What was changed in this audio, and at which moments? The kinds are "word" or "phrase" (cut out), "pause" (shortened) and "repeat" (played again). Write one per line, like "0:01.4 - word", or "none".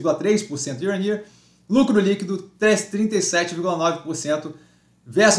none